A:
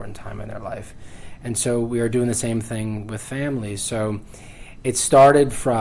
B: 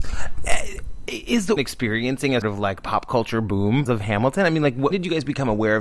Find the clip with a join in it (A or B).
B